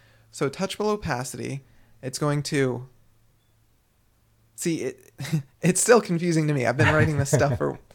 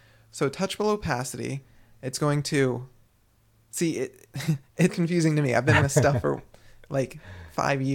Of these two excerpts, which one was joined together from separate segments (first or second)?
second